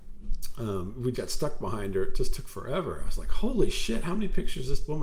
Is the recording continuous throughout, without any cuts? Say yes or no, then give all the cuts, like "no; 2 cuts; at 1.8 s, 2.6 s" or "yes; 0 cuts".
no; 1 cut; at 1.1 s